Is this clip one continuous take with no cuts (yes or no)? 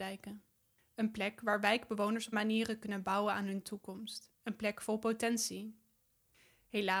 no